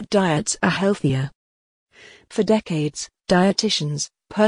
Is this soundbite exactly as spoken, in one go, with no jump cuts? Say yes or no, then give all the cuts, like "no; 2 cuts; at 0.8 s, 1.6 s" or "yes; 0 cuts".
yes; 0 cuts